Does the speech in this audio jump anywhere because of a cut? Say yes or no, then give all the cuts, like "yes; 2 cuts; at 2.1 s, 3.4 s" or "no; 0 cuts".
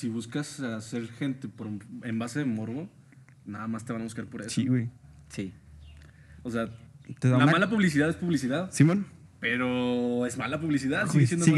no; 0 cuts